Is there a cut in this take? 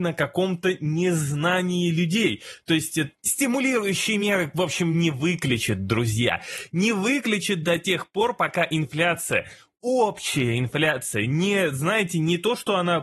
no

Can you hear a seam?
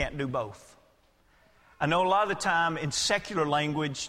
no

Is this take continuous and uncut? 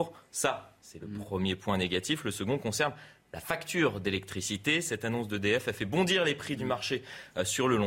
yes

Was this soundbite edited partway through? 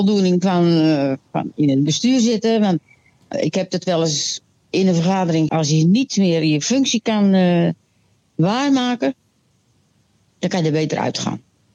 yes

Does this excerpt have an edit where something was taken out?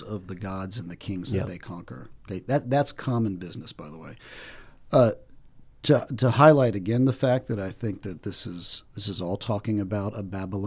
yes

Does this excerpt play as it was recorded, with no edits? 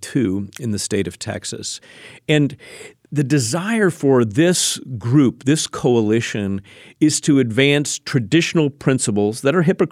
yes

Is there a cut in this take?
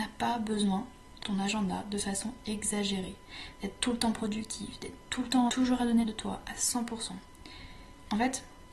yes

